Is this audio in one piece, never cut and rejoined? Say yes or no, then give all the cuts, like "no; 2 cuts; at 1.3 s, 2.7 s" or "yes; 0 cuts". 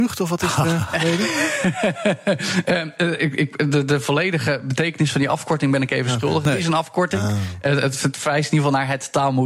yes; 0 cuts